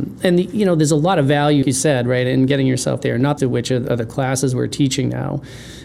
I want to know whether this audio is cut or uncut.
cut